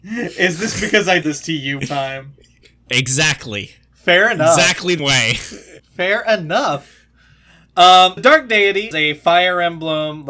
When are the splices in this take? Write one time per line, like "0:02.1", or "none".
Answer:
0:01.2
0:01.8
0:05.0
0:05.8
0:08.2
0:08.9